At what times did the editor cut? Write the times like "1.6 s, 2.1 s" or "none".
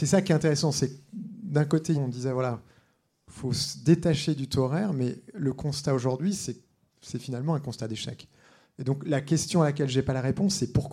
1.9 s